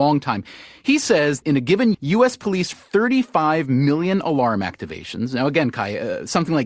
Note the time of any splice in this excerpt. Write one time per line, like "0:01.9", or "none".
0:01.4
0:01.9
0:02.7